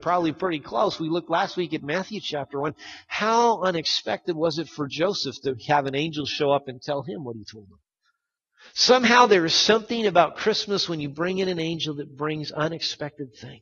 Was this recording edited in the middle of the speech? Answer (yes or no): no